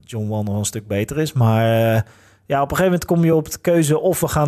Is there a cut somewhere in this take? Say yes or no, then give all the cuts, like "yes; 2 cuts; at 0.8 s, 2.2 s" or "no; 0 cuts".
no; 0 cuts